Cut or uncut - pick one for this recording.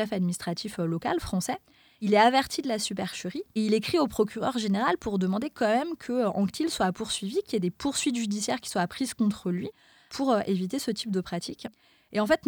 uncut